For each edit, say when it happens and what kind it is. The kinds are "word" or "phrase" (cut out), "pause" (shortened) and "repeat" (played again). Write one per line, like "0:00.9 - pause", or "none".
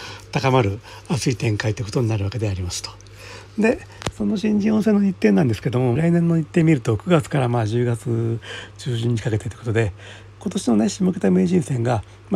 0:06.0 - phrase